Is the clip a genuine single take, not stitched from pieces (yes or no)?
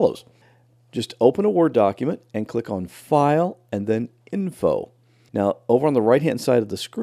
yes